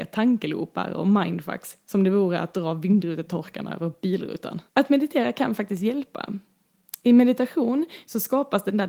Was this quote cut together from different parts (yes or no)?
yes